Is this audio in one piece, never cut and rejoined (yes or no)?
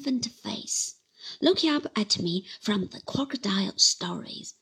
yes